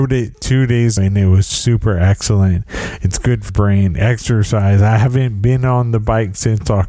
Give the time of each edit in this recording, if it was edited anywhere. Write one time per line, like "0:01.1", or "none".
0:01.0
0:03.5